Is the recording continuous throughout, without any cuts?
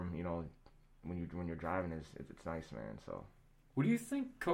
yes; 0 cuts

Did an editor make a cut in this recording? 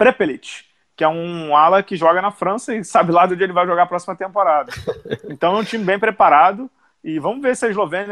no; 0 cuts

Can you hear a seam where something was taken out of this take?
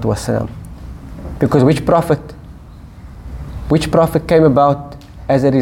no; 0 cuts

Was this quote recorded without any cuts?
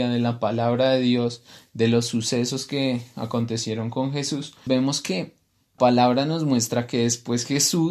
no; 2 cuts; at 4.7 s, 5.8 s

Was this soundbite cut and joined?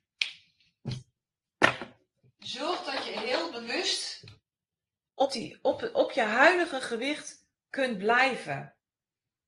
no; 0 cuts

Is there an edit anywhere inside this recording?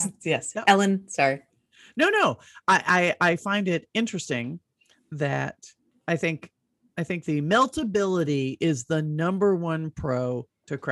no; 0 cuts

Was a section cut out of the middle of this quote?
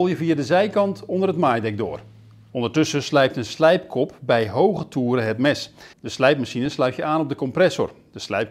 yes; 1 cut; at 5.9 s

